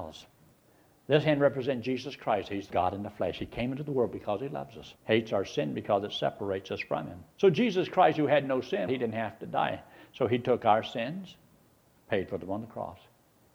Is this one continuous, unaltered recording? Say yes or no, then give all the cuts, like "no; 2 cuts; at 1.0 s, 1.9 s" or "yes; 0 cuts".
no; 4 cuts; at 2.7 s, 5.0 s, 7.3 s, 8.9 s